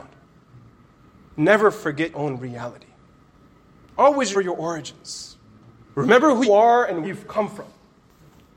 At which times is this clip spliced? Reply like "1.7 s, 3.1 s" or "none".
2.1 s, 4.3 s, 6.4 s, 7.0 s